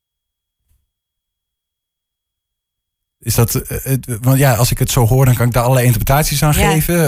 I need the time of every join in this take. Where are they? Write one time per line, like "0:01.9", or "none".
none